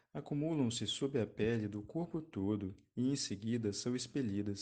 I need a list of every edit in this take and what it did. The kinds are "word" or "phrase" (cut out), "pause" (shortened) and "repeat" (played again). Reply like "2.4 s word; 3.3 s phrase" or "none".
none